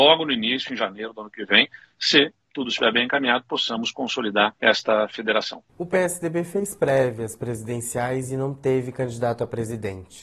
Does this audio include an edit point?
yes; 2 cuts; at 4.6 s, 5.7 s

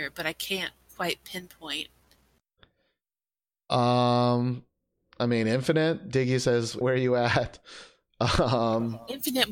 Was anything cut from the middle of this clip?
yes; 1 cut; at 6.8 s

